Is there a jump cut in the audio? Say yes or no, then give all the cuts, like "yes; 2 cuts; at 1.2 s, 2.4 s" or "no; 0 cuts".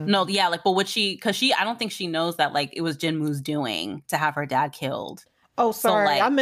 no; 0 cuts